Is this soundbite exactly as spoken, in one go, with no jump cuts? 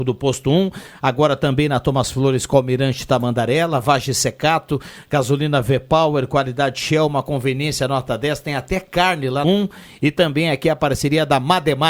no; 1 cut; at 9.4 s

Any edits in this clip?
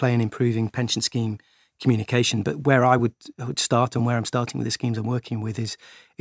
no; 0 cuts

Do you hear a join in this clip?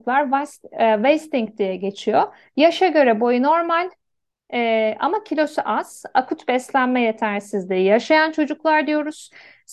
no; 0 cuts

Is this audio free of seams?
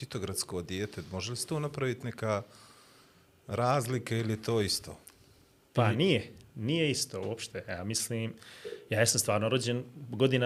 yes; 0 cuts

